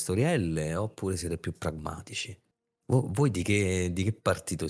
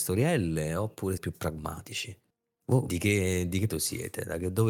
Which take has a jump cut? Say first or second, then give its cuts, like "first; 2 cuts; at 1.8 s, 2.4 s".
second; 3 cuts; at 1.2 s, 2.9 s, 3.7 s